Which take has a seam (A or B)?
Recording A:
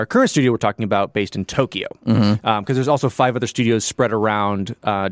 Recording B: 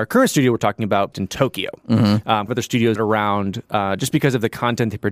B